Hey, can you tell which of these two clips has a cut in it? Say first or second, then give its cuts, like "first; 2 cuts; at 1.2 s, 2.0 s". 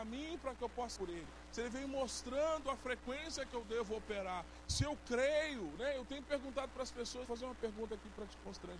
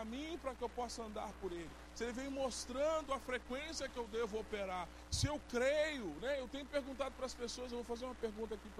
first; 2 cuts; at 1.0 s, 7.3 s